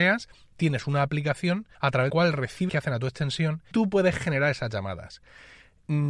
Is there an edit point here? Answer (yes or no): yes